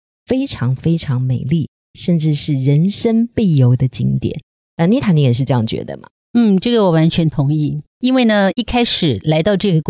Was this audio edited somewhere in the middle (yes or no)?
no